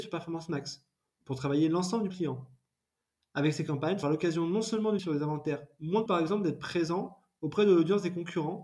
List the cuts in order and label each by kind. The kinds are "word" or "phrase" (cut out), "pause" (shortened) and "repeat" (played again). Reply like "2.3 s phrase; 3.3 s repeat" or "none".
2.1 s word; 4.0 s word; 5.0 s word; 6.1 s phrase